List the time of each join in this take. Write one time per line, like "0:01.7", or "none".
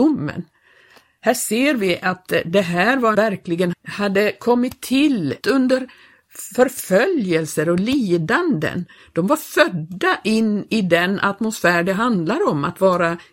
0:03.1
0:03.7
0:05.4

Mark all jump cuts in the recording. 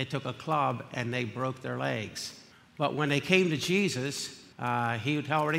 0:02.5
0:04.5

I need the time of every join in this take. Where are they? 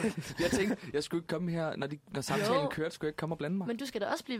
none

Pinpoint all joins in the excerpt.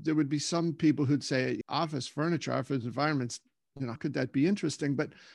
0:01.6
0:04.0

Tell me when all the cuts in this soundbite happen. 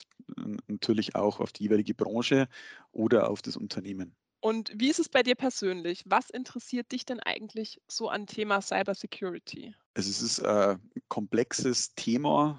0:08.3

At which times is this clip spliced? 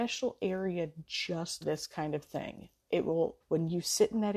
0:01.6
0:03.4

